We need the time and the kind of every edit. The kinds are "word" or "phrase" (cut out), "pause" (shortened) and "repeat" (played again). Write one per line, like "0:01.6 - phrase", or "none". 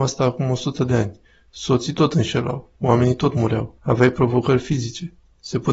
0:03.8 - pause